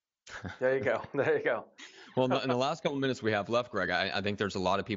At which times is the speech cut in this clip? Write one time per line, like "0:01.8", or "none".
none